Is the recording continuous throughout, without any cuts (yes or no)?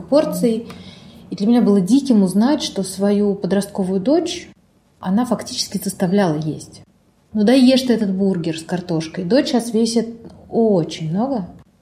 yes